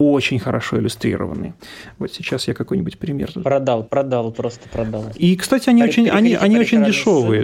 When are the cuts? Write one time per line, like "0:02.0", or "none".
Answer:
none

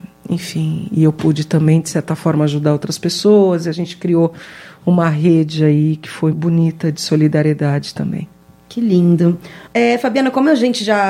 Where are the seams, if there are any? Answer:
0:06.3
0:08.4
0:09.7

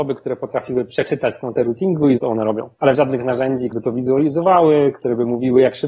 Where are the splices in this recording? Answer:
0:01.6
0:02.2
0:02.9
0:03.7

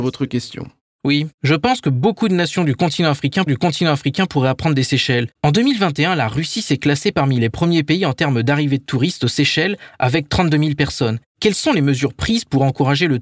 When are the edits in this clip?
0:01.3
0:03.5
0:05.4

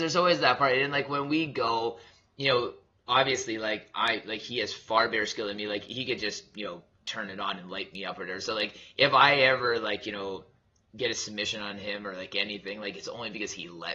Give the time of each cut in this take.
none

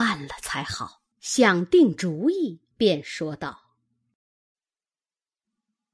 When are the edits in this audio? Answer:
0:01.1
0:02.7

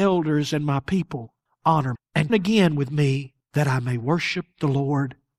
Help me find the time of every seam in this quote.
0:01.9
0:02.3

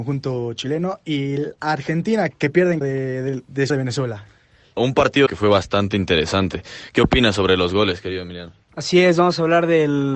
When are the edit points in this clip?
0:02.3
0:02.8
0:03.7
0:04.8
0:05.3

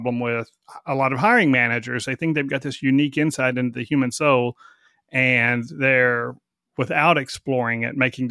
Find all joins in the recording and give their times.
none

